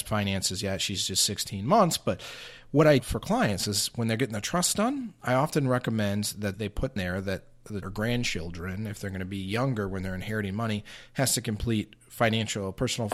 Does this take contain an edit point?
yes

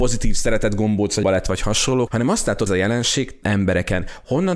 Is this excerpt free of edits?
no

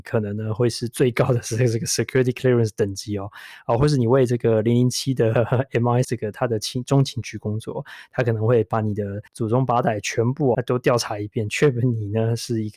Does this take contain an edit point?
yes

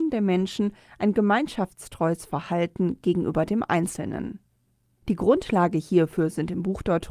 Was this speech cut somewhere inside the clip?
no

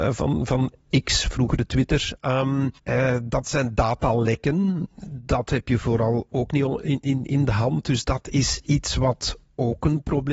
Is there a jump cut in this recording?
yes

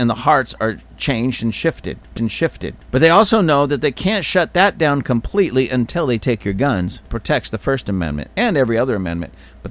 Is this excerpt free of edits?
no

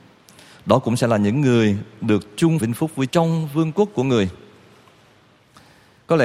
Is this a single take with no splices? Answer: no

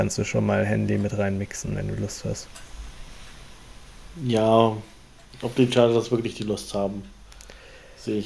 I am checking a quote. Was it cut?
no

